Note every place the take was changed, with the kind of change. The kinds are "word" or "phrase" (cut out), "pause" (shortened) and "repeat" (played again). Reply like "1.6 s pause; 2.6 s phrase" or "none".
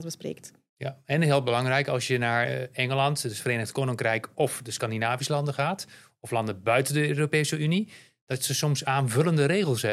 none